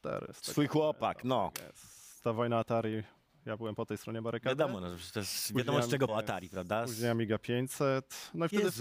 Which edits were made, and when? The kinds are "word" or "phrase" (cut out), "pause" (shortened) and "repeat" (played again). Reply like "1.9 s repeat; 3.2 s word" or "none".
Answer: 6.1 s word